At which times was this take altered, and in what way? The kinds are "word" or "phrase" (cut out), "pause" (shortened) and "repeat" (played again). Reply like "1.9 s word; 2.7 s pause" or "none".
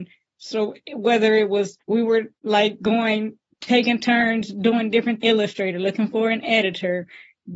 1.8 s pause; 2.4 s pause; 5.2 s phrase